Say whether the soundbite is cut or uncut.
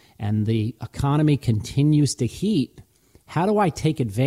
uncut